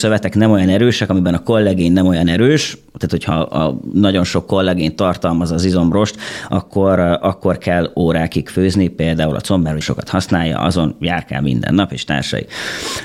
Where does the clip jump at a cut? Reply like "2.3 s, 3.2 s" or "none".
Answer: 9.8 s